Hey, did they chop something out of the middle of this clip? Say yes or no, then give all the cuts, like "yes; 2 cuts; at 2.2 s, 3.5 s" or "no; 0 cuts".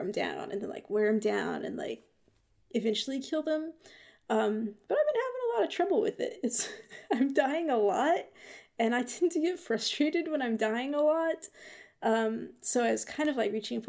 no; 0 cuts